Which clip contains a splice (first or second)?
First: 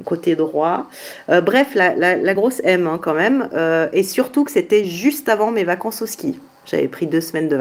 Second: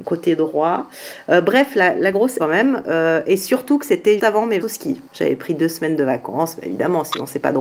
second